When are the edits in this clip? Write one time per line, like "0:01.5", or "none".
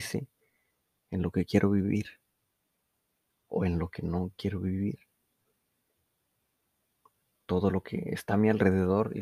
none